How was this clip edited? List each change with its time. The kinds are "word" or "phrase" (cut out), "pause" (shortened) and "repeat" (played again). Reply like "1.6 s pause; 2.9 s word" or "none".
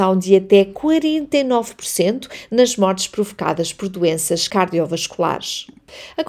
none